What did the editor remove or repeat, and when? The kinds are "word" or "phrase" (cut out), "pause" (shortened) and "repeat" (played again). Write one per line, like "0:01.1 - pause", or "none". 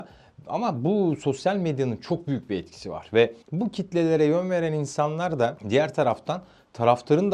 0:03.4 - pause